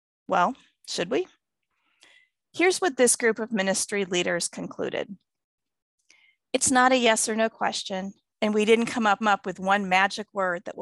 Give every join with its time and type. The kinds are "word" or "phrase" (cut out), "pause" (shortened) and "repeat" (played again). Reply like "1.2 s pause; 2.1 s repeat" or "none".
9.2 s repeat